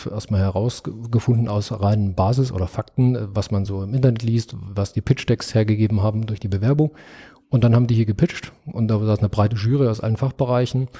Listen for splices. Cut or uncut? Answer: uncut